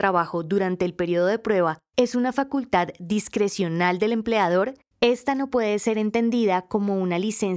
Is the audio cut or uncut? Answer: uncut